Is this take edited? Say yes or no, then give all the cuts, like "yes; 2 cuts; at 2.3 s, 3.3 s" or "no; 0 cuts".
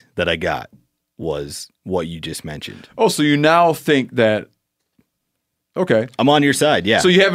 no; 0 cuts